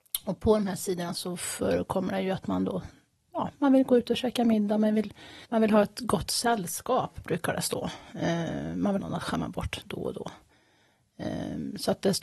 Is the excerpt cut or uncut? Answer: cut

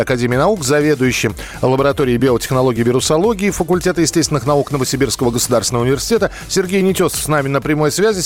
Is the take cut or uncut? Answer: uncut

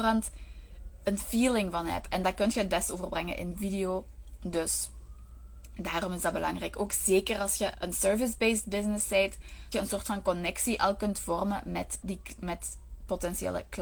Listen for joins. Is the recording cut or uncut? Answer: cut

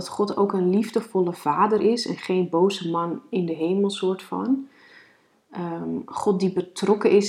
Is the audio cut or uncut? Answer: uncut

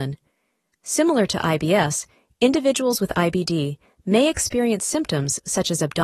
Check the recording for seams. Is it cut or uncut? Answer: uncut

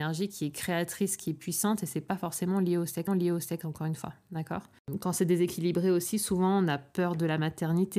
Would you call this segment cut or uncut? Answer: cut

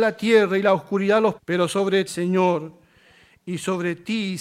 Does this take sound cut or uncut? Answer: cut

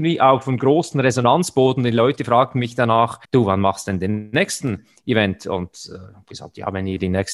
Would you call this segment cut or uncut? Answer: cut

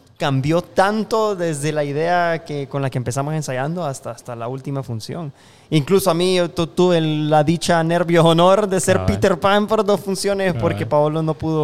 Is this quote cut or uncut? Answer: uncut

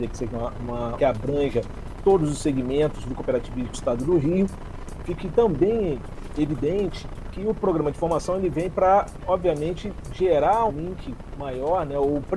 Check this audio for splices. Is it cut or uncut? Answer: cut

